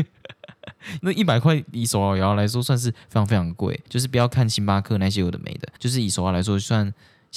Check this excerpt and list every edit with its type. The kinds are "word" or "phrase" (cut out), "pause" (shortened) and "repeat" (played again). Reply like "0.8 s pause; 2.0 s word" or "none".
3.9 s pause; 5.8 s pause